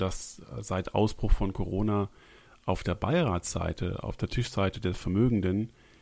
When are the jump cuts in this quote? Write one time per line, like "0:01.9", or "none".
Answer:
none